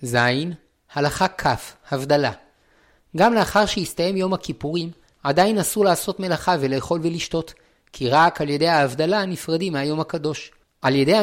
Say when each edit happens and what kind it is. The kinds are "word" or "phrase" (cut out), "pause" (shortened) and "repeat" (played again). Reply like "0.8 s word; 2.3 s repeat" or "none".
none